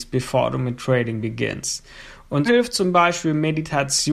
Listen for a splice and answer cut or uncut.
cut